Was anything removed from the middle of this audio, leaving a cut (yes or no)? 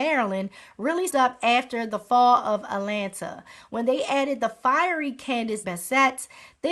yes